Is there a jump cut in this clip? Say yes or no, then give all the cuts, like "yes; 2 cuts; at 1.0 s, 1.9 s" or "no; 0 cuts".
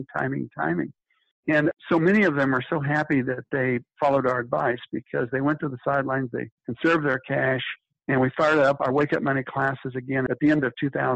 yes; 2 cuts; at 6.6 s, 7.9 s